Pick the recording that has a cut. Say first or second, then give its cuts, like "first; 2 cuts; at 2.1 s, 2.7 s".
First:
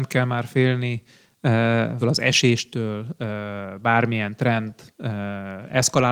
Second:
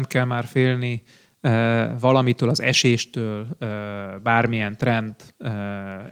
first; 1 cut; at 2.0 s